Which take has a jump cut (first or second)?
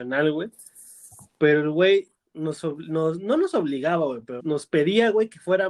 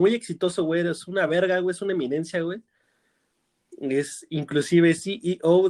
first